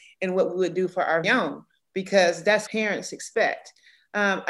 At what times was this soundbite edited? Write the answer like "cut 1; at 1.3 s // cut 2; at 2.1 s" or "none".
cut 1; at 1.2 s // cut 2; at 2.7 s